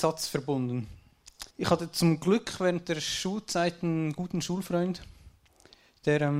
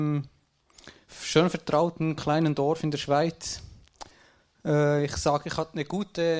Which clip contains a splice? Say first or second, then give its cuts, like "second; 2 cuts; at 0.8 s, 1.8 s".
first; 1 cut; at 1.5 s